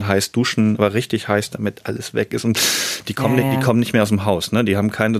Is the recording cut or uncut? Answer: uncut